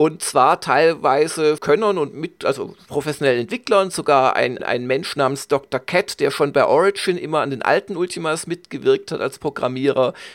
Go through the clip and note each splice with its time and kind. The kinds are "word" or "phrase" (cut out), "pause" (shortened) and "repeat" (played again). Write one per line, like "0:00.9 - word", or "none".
0:01.6 - phrase
0:04.6 - word